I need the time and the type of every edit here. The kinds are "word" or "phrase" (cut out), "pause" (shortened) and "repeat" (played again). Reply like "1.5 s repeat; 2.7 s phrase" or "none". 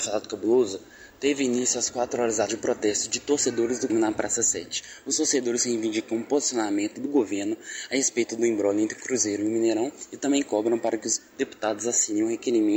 2.5 s word; 3.9 s word